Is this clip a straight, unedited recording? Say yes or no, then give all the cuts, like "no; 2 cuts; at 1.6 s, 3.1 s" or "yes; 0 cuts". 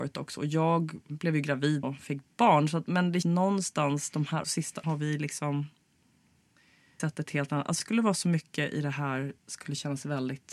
no; 7 cuts; at 1.8 s, 3.2 s, 4.4 s, 4.8 s, 7.0 s, 7.8 s, 9.4 s